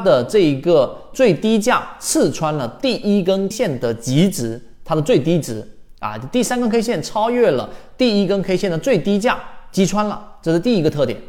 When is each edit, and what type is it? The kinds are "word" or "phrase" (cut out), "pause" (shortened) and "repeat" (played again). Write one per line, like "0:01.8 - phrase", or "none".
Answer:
0:03.5 - word